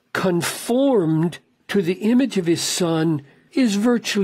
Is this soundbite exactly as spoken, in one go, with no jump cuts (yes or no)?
yes